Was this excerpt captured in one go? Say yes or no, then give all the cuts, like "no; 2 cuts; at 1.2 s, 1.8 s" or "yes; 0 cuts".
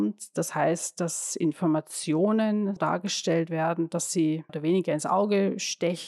no; 2 cuts; at 2.8 s, 4.5 s